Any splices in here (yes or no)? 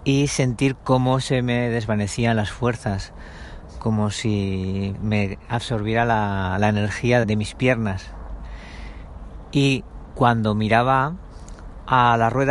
yes